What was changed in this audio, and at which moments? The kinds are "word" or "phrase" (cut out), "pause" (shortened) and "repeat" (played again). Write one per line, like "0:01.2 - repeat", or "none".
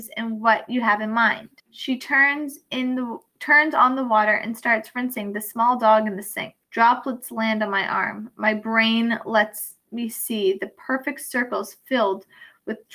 0:01.6 - pause
0:06.6 - pause